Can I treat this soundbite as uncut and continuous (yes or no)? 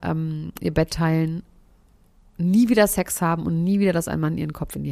yes